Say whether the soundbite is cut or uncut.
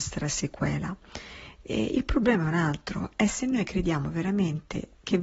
uncut